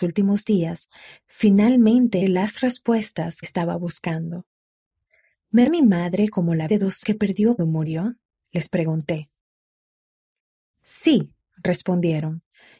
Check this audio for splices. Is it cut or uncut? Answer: cut